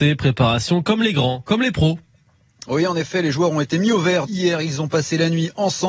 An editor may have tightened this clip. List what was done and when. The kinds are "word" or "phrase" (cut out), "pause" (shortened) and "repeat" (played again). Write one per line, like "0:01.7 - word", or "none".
0:04.3 - word